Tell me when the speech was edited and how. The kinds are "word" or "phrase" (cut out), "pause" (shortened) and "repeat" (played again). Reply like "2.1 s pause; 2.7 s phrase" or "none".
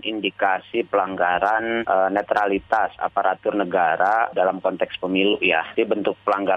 none